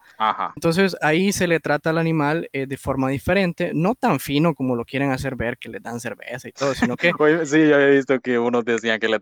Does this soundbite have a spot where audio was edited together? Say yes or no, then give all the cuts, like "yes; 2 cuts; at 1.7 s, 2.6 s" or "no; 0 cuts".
no; 0 cuts